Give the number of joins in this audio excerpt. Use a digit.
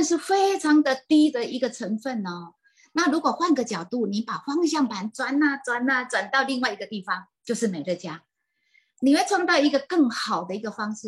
1